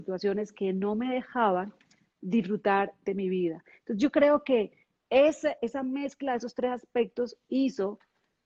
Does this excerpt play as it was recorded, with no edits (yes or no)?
no